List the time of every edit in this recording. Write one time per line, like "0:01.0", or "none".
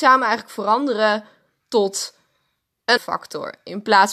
0:03.0